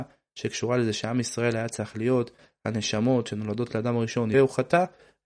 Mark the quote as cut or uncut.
cut